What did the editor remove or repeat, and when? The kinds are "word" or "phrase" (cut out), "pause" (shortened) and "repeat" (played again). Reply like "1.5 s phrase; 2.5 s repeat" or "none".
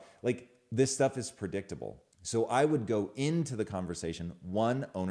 2.1 s pause